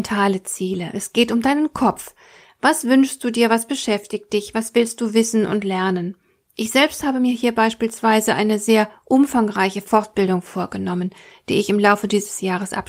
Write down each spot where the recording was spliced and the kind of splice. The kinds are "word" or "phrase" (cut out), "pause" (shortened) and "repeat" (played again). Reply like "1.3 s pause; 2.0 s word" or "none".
none